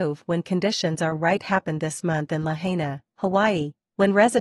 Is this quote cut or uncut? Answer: uncut